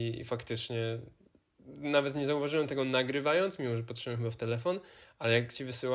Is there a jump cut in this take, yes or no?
no